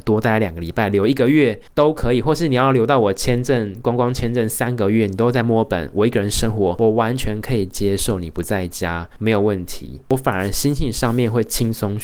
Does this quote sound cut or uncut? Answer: uncut